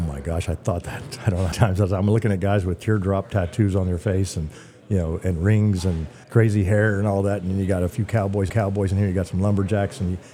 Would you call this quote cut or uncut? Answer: cut